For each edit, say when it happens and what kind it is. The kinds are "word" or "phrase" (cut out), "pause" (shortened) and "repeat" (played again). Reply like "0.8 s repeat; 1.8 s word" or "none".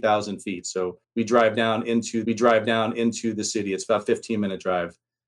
1.0 s pause; 2.2 s repeat